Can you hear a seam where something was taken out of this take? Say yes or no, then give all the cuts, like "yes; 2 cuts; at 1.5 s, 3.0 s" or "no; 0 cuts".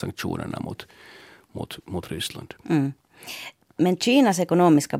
no; 0 cuts